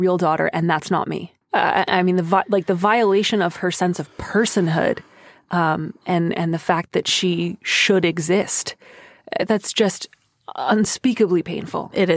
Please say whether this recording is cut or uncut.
cut